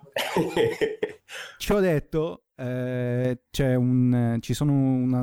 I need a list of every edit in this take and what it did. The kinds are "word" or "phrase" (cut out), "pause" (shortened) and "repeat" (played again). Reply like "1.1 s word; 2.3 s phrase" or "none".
none

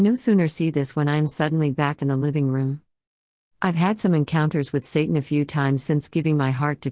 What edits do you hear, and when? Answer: none

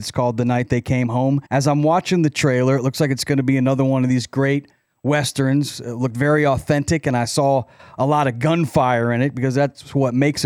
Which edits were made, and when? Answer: 1.5 s pause

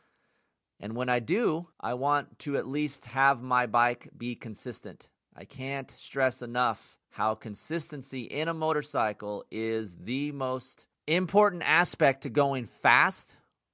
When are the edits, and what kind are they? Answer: 1.7 s pause; 7.0 s pause; 11.0 s pause

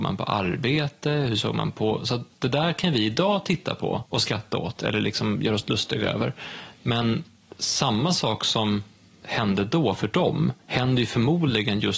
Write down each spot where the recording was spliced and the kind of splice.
4.1 s pause; 10.6 s pause

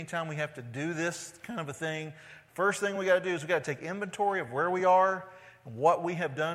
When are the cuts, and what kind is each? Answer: none

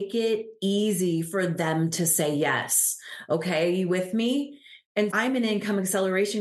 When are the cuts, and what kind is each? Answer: 5.1 s word

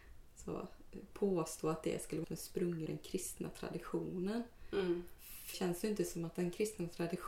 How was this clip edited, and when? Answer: 2.2 s word; 2.9 s word; 5.5 s word

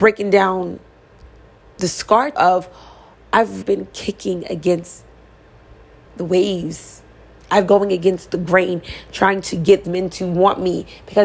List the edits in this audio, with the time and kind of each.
2.3 s word; 3.6 s word; 7.7 s word; 9.8 s word

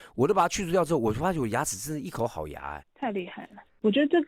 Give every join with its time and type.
2.8 s word

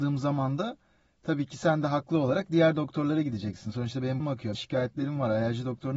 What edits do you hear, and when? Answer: 4.2 s word; 4.5 s phrase

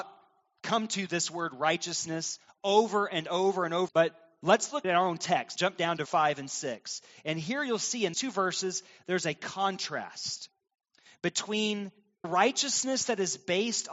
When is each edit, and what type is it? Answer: 3.9 s word; 4.8 s word; 5.6 s word; 6.1 s word; 8.1 s word; 12.2 s word

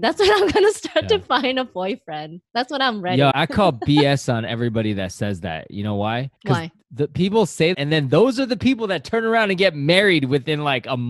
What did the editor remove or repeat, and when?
2.5 s pause; 3.3 s word; 6.4 s pause; 7.7 s word

